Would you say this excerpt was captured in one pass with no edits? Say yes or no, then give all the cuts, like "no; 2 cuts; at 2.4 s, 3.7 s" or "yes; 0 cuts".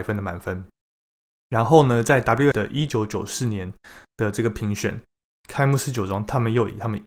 no; 1 cut; at 2.5 s